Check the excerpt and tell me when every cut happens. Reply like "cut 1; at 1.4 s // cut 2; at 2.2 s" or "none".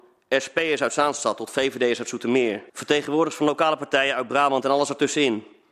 cut 1; at 2.7 s